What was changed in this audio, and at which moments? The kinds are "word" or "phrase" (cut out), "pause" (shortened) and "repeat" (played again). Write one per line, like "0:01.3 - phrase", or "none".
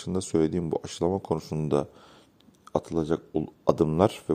none